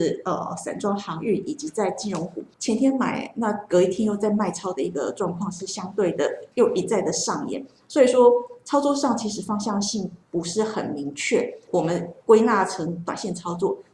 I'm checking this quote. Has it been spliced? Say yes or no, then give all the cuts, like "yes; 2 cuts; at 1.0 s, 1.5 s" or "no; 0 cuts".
yes; 2 cuts; at 6.5 s, 10.2 s